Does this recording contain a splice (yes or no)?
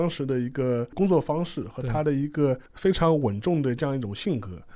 yes